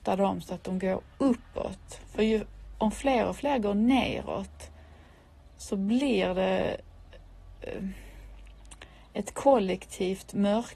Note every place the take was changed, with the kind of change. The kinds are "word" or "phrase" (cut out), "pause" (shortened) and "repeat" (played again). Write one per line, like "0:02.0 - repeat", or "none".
none